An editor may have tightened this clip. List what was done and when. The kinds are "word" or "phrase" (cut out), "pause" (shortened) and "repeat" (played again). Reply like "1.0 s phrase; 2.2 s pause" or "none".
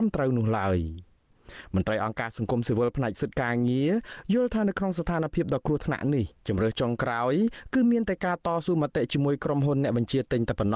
6.4 s pause